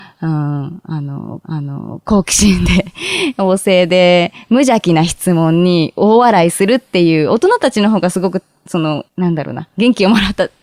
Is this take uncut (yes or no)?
no